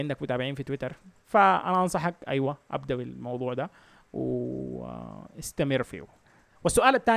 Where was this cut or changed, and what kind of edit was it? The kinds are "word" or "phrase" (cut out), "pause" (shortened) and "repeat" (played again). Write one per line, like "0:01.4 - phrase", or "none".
none